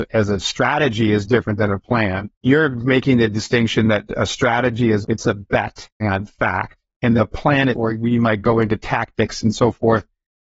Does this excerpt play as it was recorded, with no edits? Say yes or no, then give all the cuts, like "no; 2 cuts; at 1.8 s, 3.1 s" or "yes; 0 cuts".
no; 5 cuts; at 2.3 s, 5.0 s, 6.0 s, 7.2 s, 7.7 s